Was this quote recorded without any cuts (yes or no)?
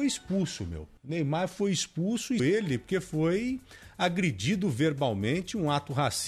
no